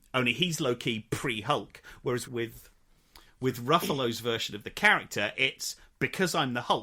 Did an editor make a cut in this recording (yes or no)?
yes